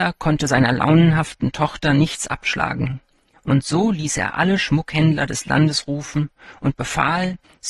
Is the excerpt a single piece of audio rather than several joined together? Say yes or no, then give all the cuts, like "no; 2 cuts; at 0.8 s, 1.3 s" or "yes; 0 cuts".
yes; 0 cuts